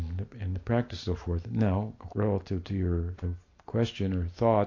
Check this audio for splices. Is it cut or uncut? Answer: cut